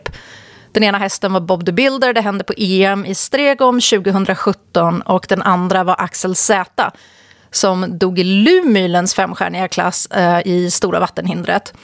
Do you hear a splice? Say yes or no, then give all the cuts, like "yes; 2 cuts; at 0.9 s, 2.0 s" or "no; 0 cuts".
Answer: no; 0 cuts